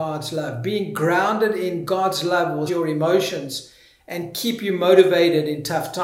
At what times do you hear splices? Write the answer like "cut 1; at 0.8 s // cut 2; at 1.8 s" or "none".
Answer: cut 1; at 2.7 s